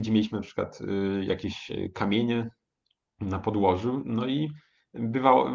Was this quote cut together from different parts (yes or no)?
no